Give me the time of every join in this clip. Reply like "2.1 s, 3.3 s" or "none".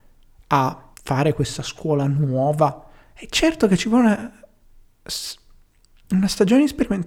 0.9 s